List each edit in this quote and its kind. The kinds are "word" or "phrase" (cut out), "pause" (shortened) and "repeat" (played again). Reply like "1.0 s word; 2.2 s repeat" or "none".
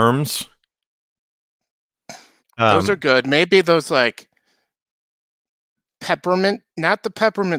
2.4 s pause; 6.7 s pause

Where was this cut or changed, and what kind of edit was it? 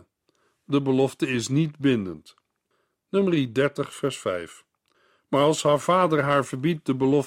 none

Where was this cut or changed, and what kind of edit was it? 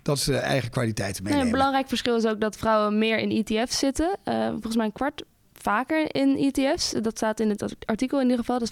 5.4 s word

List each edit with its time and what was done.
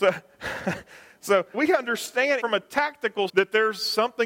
1.5 s word; 2.4 s word; 3.3 s word

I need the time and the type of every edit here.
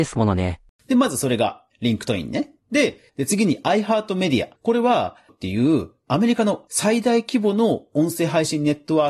4.6 s pause; 5.3 s word

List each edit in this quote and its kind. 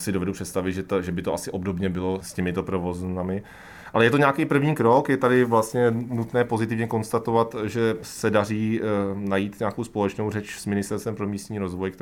none

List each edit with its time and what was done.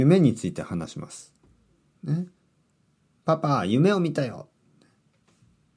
none

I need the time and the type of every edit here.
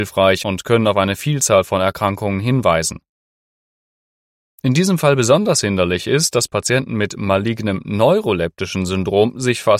none

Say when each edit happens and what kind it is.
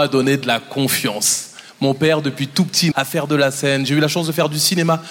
2.9 s word

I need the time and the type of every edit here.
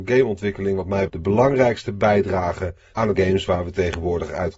1.1 s word; 3.1 s phrase

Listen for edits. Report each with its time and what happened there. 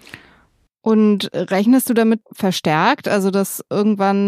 2.2 s phrase

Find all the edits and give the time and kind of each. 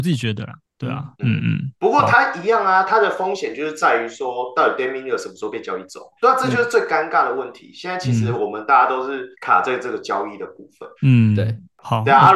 1.1 s pause; 1.8 s pause; 6.2 s pause; 9.3 s pause; 11.0 s pause

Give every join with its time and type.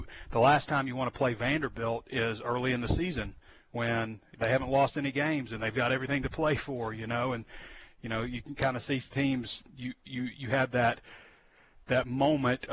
none

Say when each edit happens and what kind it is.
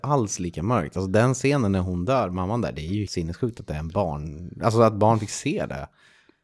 3.1 s word

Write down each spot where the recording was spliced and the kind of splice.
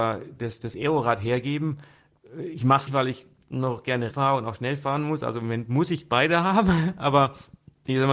2.9 s word; 4.1 s word

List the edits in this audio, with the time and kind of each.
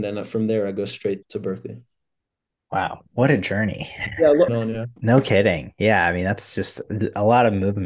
1.2 s word; 3.1 s pause; 4.5 s phrase; 5.0 s pause

